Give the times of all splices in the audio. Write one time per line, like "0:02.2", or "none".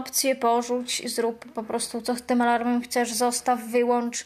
none